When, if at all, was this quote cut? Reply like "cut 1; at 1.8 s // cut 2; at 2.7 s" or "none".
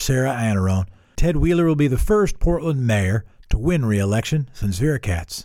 none

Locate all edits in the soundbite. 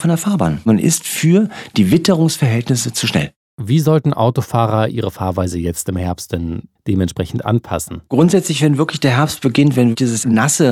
cut 1; at 8.1 s

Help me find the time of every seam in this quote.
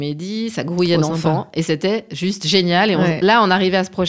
none

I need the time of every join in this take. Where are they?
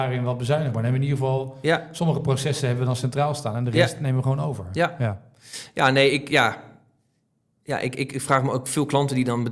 none

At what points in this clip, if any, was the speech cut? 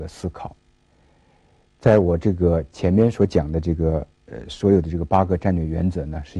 cut 1; at 4.2 s

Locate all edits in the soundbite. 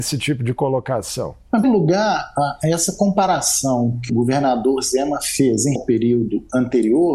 cut 1; at 1.6 s // cut 2; at 4.1 s // cut 3; at 5.8 s

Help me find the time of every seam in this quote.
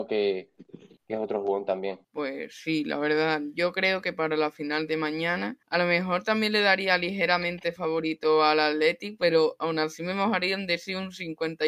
cut 1; at 2.0 s // cut 2; at 5.6 s

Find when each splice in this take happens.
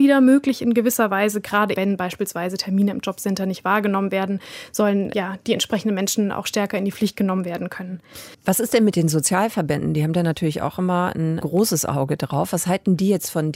cut 1; at 1.7 s // cut 2; at 5.1 s // cut 3; at 8.3 s // cut 4; at 11.4 s

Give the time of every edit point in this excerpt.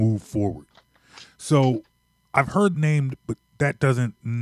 cut 1; at 2.7 s

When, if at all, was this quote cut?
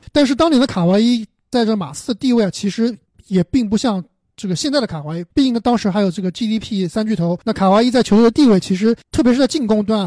cut 1; at 3.1 s // cut 2; at 5.3 s // cut 3; at 7.4 s // cut 4; at 9.0 s

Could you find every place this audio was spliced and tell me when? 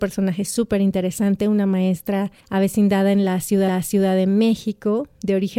cut 1; at 2.4 s // cut 2; at 3.7 s

